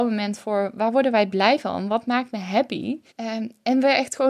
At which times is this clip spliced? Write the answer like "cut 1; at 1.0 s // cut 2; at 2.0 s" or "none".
cut 1; at 3.1 s